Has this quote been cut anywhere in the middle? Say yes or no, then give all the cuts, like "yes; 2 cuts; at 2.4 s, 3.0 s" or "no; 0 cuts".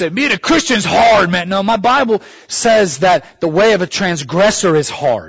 no; 0 cuts